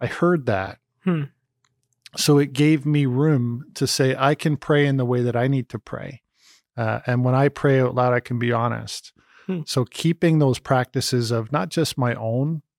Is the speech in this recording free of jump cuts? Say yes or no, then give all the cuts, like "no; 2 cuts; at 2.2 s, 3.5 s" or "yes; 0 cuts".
yes; 0 cuts